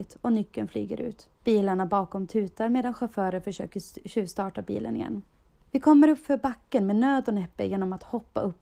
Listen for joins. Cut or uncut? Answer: cut